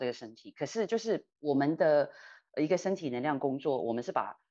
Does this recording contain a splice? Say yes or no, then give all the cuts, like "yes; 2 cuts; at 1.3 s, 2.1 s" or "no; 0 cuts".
yes; 1 cut; at 1.3 s